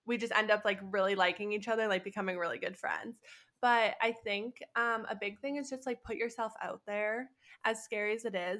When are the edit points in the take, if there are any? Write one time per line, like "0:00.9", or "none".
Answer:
none